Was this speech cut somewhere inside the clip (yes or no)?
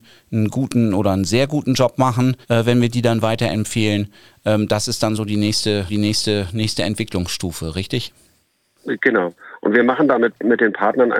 yes